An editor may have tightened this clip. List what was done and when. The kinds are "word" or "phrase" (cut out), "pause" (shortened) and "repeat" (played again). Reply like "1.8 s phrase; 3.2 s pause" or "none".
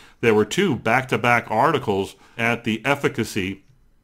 2.4 s word